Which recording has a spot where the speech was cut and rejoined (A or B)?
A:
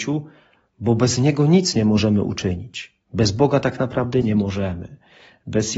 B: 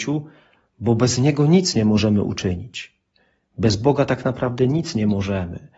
A